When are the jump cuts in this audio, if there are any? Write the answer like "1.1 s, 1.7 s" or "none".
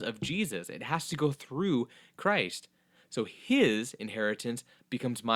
none